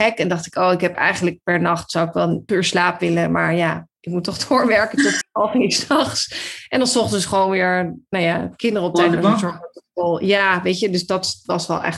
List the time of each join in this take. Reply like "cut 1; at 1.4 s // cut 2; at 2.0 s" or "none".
cut 1; at 2.5 s // cut 2; at 5.2 s